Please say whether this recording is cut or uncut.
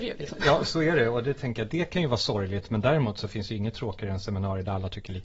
uncut